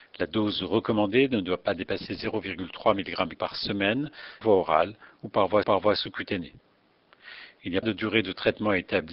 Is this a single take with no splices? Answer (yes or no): no